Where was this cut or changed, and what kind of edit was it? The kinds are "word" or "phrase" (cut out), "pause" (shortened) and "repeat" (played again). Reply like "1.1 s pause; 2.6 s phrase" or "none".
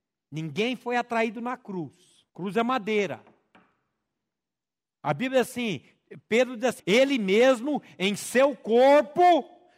2.3 s pause; 6.8 s word